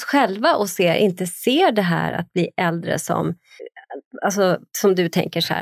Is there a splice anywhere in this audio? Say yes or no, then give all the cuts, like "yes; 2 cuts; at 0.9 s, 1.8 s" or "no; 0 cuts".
no; 0 cuts